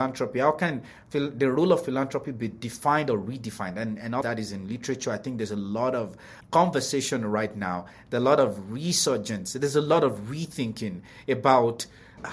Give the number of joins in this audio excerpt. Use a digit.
1